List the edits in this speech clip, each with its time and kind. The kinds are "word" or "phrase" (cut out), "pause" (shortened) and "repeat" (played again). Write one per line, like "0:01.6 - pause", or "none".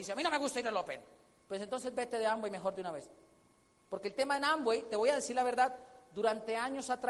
none